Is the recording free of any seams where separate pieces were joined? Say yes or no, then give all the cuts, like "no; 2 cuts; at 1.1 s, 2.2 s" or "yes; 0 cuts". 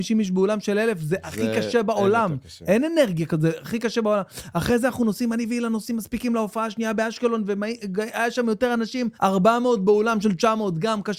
no; 1 cut; at 9.1 s